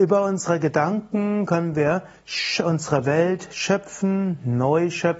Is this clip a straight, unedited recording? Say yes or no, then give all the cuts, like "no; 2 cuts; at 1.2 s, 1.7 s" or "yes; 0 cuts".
yes; 0 cuts